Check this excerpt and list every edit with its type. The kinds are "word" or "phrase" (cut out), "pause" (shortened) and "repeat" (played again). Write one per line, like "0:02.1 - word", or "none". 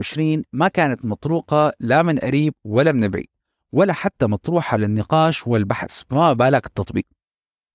none